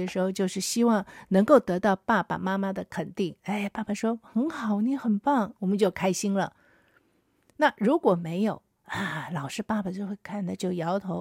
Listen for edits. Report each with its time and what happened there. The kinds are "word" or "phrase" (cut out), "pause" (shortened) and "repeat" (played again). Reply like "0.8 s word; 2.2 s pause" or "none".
none